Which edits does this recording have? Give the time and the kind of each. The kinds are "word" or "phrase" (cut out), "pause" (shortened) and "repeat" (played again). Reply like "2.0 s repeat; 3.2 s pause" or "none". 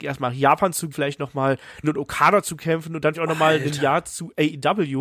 0.9 s word; 1.8 s word; 3.1 s word